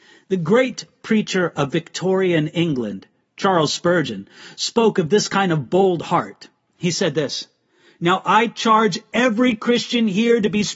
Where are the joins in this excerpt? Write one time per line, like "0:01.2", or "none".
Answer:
none